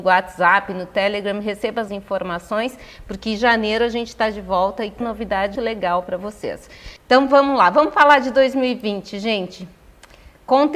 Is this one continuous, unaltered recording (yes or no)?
no